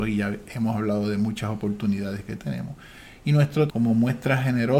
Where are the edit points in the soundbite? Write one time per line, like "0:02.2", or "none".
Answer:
0:03.7